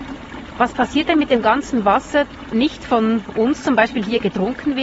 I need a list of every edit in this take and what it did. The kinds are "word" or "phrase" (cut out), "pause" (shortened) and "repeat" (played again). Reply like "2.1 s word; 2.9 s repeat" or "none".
2.5 s word